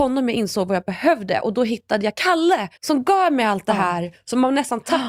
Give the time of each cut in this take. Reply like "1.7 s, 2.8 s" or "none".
2.8 s